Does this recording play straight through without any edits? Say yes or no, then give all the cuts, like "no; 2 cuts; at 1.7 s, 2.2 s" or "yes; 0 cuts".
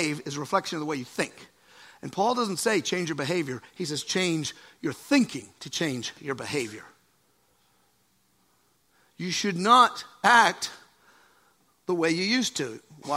yes; 0 cuts